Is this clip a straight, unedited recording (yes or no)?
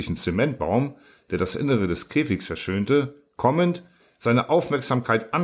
yes